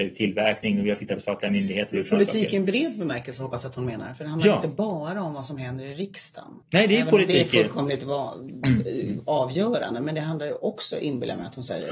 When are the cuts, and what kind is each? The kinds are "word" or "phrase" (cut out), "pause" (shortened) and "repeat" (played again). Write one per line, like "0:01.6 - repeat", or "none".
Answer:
0:06.6 - pause